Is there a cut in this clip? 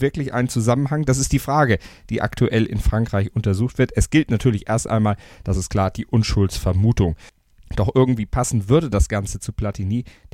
no; 0 cuts

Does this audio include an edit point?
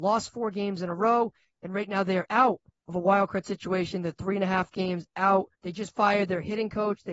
yes; 3 cuts; at 2.2 s, 2.7 s, 5.5 s

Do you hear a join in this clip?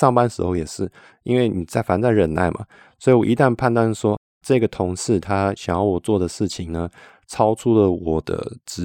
no; 0 cuts

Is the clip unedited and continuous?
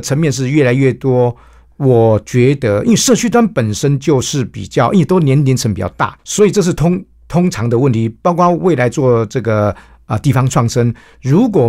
no; 1 cut; at 6.2 s

